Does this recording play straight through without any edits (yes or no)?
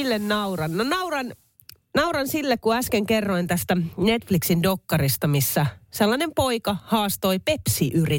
yes